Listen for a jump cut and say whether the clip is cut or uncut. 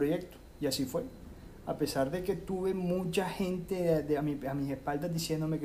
uncut